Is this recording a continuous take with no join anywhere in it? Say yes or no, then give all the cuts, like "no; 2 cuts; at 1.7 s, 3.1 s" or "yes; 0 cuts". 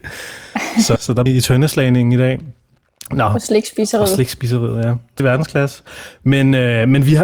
no; 3 cuts; at 1.0 s, 1.3 s, 5.2 s